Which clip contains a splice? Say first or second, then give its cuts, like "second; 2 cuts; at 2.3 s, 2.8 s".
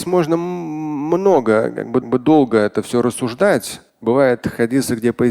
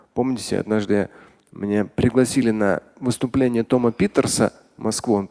first; 2 cuts; at 2.0 s, 3.9 s